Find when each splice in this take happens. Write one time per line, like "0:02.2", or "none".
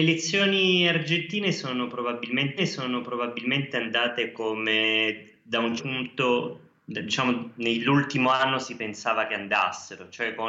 0:02.6
0:05.8